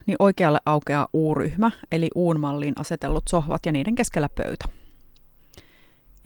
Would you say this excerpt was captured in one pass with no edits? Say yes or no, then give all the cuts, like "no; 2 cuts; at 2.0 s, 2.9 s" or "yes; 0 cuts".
yes; 0 cuts